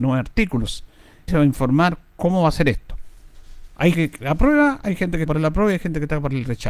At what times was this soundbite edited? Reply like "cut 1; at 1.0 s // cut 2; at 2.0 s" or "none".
cut 1; at 1.3 s // cut 2; at 3.9 s // cut 3; at 5.3 s